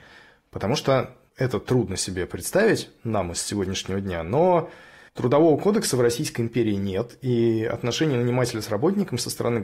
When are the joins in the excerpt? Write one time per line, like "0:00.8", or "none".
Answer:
none